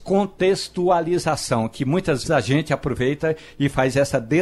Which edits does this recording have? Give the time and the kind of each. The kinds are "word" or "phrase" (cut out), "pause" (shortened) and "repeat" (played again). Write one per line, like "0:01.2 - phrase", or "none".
0:02.2 - word